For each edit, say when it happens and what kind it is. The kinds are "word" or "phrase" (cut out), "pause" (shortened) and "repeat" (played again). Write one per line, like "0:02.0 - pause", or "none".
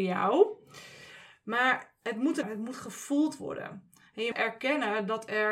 0:02.4 - phrase
0:04.3 - word